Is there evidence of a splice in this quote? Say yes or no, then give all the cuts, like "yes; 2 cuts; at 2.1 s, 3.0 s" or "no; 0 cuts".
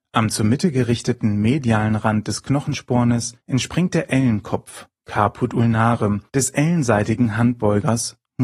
yes; 2 cuts; at 3.4 s, 6.3 s